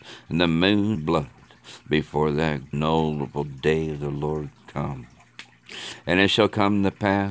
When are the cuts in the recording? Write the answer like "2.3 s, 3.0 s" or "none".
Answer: 0.9 s, 2.7 s

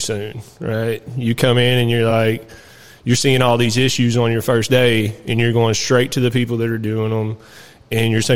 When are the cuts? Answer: none

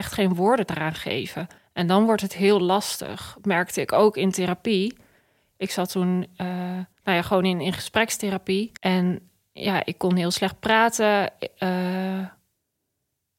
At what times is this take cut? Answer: 1.6 s, 6.9 s, 8.8 s

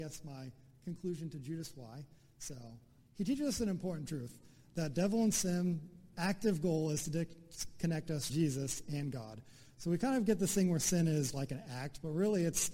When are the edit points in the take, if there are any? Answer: 3.0 s, 8.3 s, 11.3 s

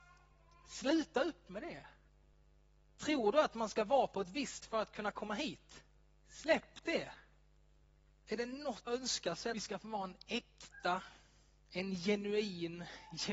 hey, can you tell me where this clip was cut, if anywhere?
4.6 s, 6.0 s, 8.9 s, 9.5 s

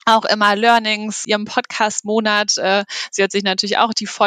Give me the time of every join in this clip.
1.2 s

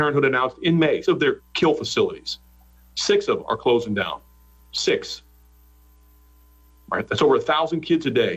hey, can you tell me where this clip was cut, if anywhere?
1.0 s, 1.4 s, 3.4 s

